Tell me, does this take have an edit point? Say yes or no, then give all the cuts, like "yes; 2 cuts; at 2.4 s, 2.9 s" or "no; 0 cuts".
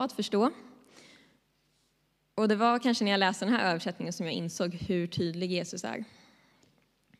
no; 0 cuts